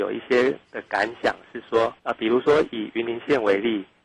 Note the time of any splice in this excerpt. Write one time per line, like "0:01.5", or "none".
0:02.0